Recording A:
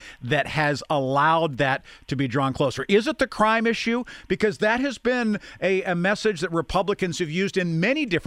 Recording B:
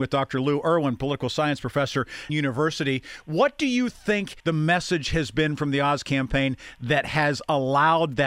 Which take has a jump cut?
B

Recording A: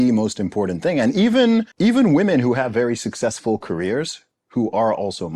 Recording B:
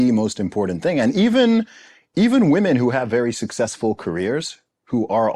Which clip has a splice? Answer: A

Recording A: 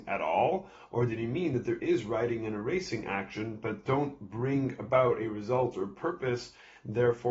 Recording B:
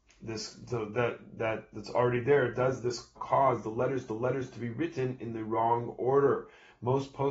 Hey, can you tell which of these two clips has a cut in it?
B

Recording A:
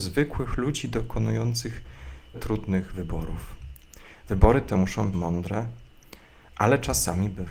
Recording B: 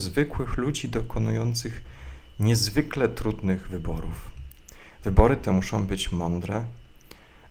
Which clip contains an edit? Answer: A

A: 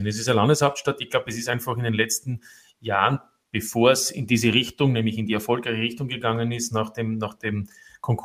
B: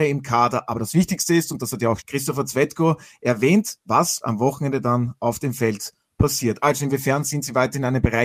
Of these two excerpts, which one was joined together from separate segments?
B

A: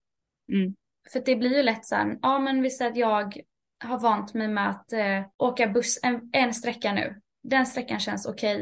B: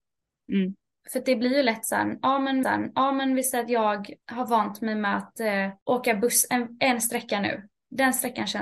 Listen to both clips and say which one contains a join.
B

